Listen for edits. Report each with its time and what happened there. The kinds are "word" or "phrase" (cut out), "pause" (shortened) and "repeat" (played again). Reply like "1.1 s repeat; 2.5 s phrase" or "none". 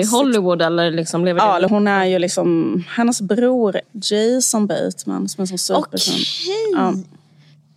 1.7 s word; 3.8 s word